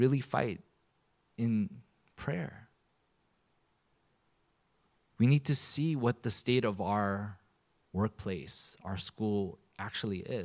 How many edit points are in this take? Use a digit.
0